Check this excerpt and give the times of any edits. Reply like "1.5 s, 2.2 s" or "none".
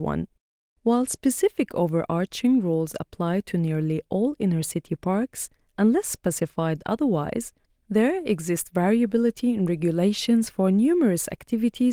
none